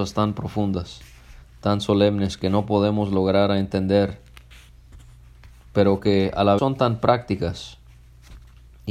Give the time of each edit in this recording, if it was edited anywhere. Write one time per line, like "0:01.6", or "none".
0:01.4
0:06.6

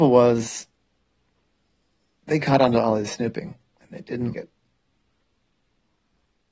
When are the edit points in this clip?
0:04.3

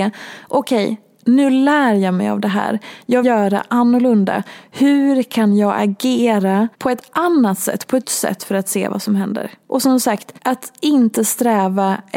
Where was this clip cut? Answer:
0:03.2
0:06.7
0:08.0
0:10.4

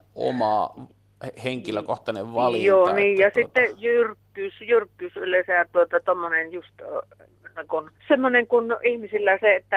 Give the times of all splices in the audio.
0:08.0

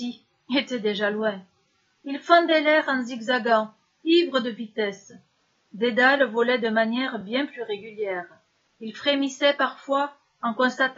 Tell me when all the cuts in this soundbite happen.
none

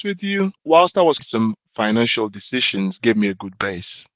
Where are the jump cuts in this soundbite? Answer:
0:01.2
0:01.6
0:03.0

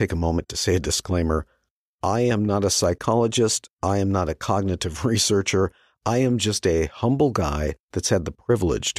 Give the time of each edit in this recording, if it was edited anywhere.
none

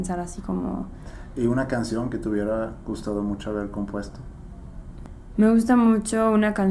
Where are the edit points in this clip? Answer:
none

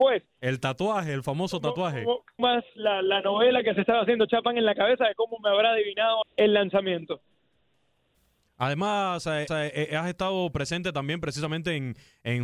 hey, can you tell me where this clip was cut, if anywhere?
0:02.4
0:06.2
0:09.5

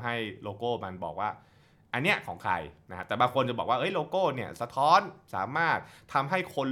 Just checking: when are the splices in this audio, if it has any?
none

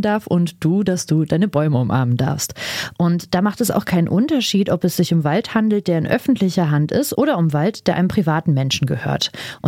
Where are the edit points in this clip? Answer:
none

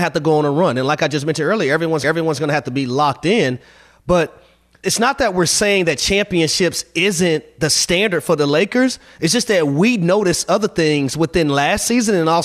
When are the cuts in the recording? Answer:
0:02.0
0:04.8

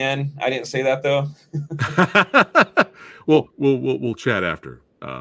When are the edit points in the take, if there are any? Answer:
0:03.5

